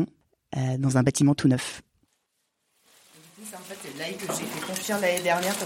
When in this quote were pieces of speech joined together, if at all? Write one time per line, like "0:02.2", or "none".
0:04.2

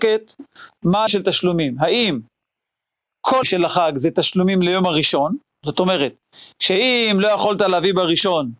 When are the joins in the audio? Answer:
0:01.1
0:03.4

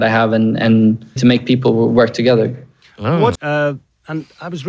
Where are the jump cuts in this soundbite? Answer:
0:01.2
0:03.4

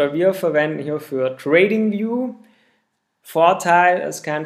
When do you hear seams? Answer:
none

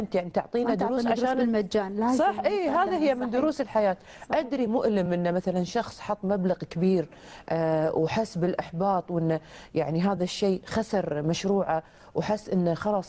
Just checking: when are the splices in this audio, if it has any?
none

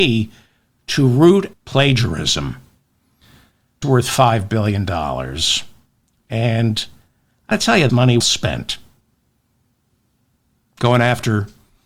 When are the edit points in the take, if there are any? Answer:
0:01.5
0:03.8
0:07.5
0:07.9
0:08.2

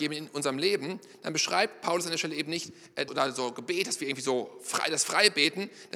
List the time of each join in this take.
0:03.1

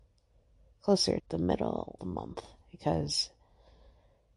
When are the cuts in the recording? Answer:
0:01.2
0:02.0

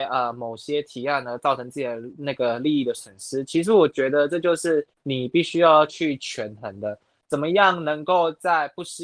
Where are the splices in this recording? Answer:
0:04.9

